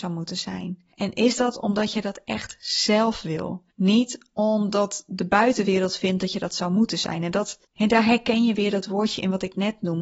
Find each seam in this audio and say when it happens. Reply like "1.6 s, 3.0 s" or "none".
0.9 s, 3.7 s, 7.6 s